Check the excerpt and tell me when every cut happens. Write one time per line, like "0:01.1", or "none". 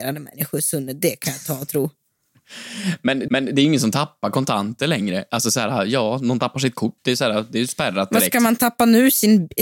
0:03.3
0:07.0